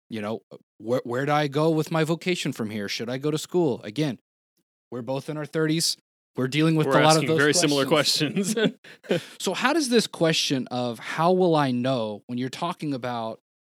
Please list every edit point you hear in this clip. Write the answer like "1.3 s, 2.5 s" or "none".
none